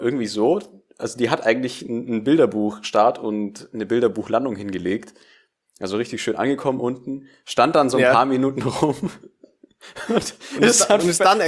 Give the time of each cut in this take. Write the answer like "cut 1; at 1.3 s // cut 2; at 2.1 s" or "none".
none